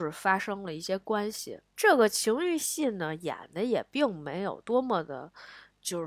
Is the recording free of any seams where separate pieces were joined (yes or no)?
no